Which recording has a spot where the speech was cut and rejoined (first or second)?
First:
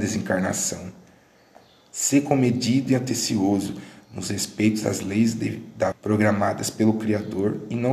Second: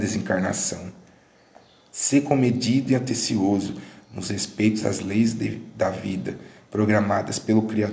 first